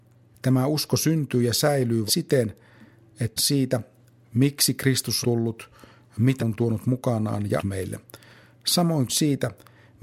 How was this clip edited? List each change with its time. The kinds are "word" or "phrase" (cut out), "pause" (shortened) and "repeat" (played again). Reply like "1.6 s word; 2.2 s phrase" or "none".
2.1 s word; 3.4 s word; 5.2 s word; 6.4 s word; 7.6 s word; 9.1 s word